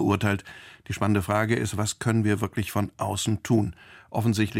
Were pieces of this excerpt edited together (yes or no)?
no